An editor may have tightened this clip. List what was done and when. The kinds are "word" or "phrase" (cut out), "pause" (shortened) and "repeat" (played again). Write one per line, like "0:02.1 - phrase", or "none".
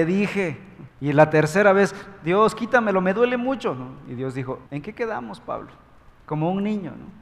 0:00.9 - pause
0:04.7 - pause